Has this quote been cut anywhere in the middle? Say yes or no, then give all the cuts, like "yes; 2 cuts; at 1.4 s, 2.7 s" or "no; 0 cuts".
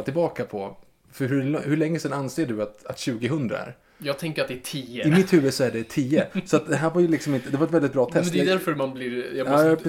no; 0 cuts